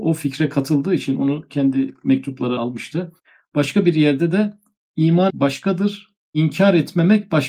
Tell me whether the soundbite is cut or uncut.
cut